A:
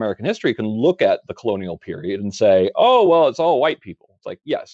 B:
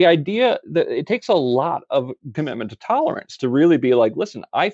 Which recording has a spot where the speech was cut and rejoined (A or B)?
B